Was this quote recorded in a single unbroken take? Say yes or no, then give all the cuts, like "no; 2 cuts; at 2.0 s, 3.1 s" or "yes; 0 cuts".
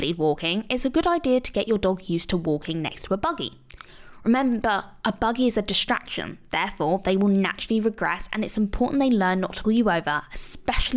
no; 1 cut; at 9.6 s